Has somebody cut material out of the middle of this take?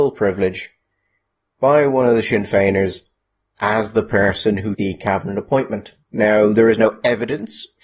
yes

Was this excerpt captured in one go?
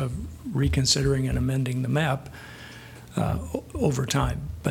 yes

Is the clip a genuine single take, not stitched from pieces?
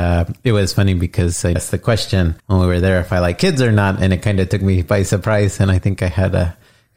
no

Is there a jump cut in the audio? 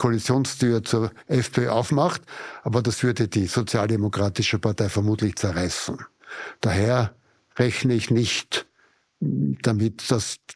no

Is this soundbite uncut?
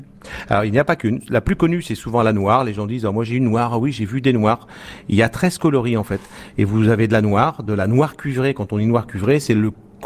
yes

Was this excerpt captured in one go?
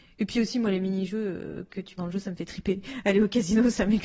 no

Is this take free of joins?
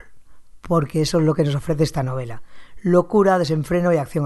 yes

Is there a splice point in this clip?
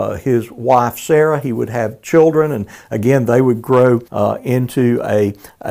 yes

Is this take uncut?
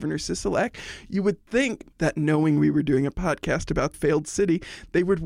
no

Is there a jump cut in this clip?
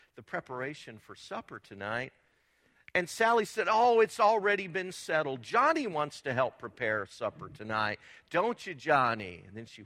no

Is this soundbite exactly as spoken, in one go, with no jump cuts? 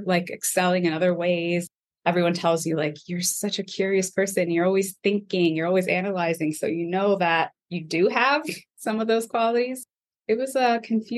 yes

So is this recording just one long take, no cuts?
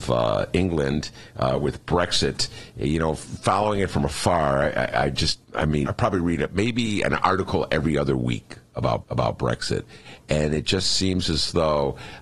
no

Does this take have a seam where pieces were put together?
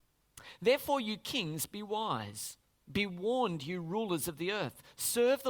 no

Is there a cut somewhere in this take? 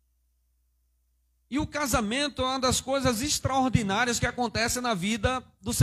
no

